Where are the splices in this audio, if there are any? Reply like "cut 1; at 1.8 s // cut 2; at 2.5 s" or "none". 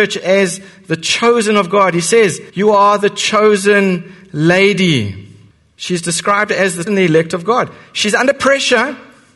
cut 1; at 2.5 s // cut 2; at 5.5 s // cut 3; at 6.9 s